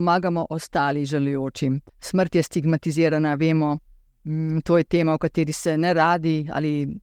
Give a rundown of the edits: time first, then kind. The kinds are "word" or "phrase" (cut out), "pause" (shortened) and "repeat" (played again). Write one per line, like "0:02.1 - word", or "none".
0:01.9 - pause